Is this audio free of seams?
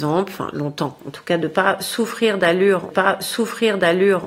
no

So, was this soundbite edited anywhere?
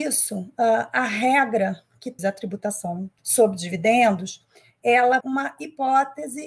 yes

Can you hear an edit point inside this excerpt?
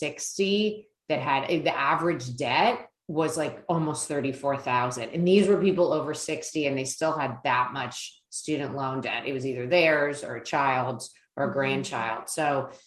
no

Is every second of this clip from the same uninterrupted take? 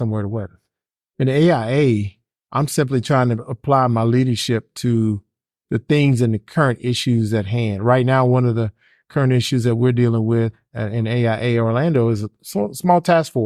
yes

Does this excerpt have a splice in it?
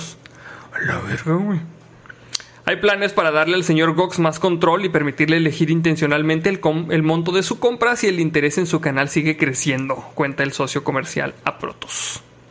no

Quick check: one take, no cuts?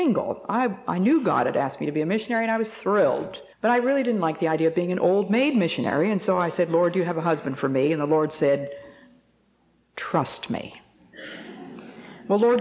no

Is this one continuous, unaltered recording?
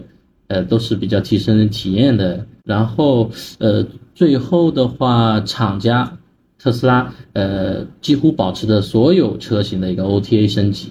yes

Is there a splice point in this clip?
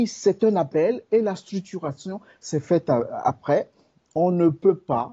no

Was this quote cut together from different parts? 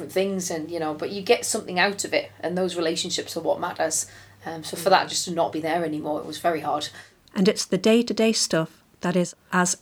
no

